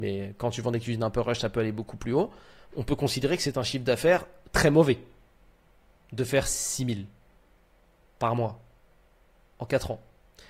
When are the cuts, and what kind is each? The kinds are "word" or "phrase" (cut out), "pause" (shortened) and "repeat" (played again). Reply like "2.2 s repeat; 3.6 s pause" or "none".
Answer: none